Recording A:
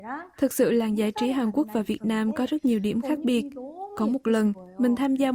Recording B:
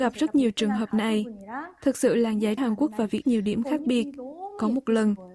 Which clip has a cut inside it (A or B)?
B